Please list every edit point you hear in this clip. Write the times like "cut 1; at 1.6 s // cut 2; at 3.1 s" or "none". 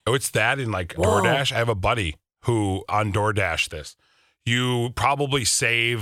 cut 1; at 0.9 s // cut 2; at 2.9 s // cut 3; at 3.7 s